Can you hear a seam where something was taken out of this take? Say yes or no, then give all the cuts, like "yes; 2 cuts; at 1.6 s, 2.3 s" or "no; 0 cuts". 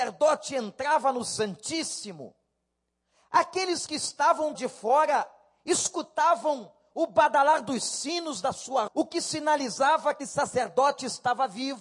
yes; 3 cuts; at 4.5 s, 8.9 s, 10.2 s